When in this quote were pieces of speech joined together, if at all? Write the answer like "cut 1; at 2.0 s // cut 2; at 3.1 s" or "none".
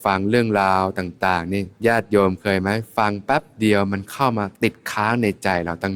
cut 1; at 1.8 s // cut 2; at 4.5 s